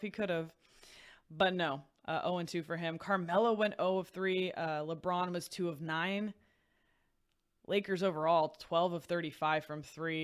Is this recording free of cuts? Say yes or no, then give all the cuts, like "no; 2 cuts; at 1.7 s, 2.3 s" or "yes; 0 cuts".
yes; 0 cuts